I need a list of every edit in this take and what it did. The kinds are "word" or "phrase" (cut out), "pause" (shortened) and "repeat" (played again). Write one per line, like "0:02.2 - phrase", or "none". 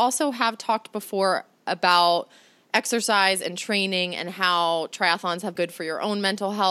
0:05.6 - word

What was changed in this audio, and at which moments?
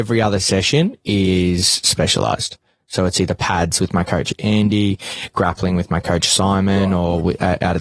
none

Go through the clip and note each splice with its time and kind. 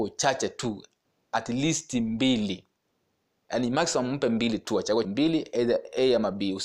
0:03.4 - word
0:05.0 - word

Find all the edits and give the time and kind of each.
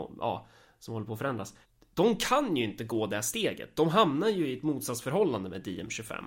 0:01.6 - pause

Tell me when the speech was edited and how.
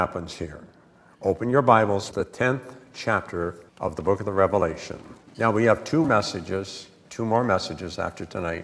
0:02.1 - phrase
0:03.7 - pause
0:06.0 - word

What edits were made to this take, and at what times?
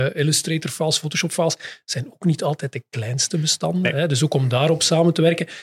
none

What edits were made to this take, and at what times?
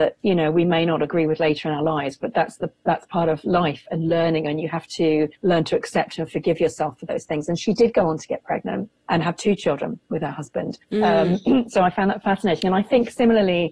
0:05.4 - pause
0:09.0 - pause
0:10.8 - pause

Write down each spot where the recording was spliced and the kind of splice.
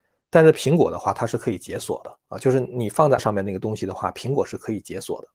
0:03.2 - word

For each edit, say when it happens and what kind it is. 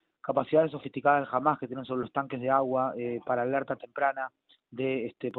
none

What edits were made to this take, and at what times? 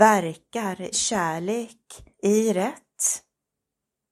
0:00.9 - word
0:02.1 - pause

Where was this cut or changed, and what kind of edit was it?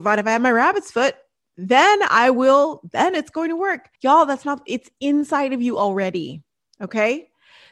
0:03.9 - pause

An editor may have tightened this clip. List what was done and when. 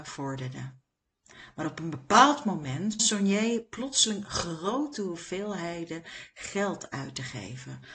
0:03.0 - word

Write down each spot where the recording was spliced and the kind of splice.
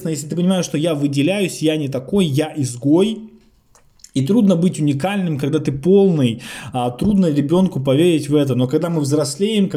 none

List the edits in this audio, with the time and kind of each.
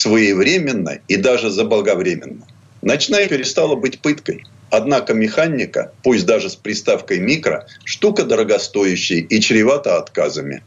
0:03.3 - word

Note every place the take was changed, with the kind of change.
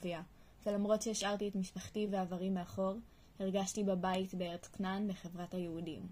none

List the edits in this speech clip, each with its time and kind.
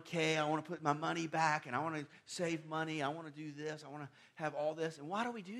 none

